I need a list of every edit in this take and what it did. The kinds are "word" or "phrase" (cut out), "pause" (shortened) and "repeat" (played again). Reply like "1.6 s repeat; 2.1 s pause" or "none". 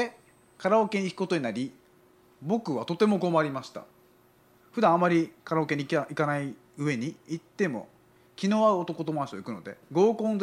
none